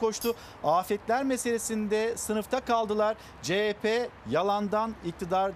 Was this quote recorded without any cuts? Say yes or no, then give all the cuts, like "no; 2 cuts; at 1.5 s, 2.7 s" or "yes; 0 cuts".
yes; 0 cuts